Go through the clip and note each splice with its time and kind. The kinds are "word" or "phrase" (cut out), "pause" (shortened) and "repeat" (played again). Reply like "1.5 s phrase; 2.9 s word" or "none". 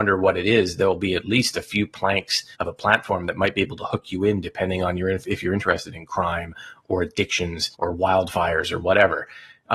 2.5 s pause; 7.7 s pause